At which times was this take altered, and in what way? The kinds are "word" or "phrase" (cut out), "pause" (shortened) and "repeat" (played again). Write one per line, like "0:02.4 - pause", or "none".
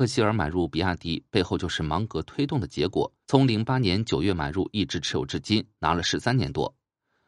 0:03.2 - pause